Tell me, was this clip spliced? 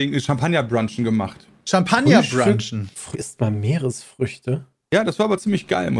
yes; 1 cut; at 3.1 s

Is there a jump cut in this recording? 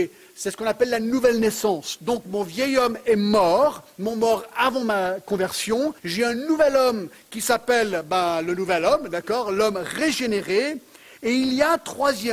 yes; 1 cut; at 6.0 s

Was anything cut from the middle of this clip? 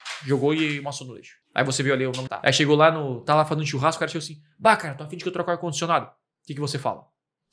yes; 1 cut; at 2.3 s

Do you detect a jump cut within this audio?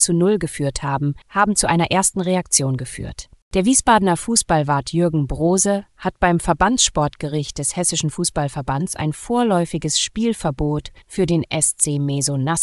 yes; 2 cuts; at 1.2 s, 11.0 s

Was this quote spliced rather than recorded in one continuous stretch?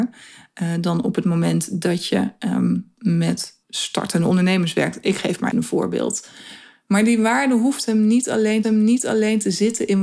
yes; 3 cuts; at 3.6 s, 5.5 s, 8.6 s

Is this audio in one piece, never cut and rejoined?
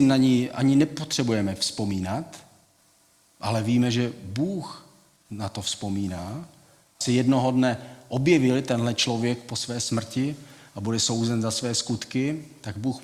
no; 1 cut; at 7.0 s

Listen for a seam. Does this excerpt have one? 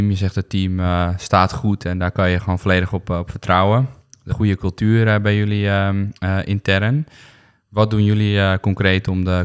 yes; 2 cuts; at 4.3 s, 6.1 s

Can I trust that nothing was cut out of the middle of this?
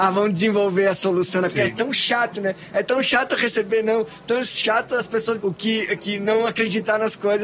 no; 1 cut; at 5.4 s

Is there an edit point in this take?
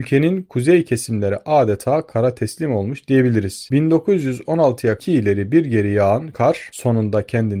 yes; 1 cut; at 5.0 s

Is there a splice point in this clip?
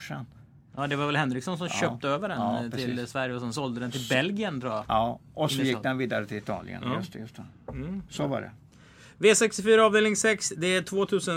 no; 0 cuts

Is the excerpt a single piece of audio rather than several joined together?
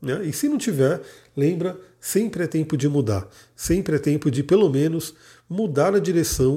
yes; 0 cuts

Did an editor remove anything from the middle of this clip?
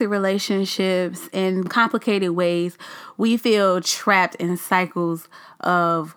no; 0 cuts

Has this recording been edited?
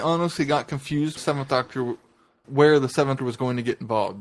yes; 3 cuts; at 1.2 s, 2.4 s, 3.2 s

